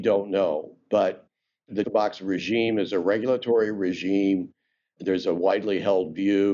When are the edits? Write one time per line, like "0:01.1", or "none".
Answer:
0:01.8